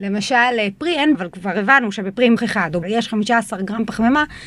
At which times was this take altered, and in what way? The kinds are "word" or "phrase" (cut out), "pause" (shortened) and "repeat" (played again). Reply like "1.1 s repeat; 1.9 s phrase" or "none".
1.1 s word; 2.4 s word; 2.8 s word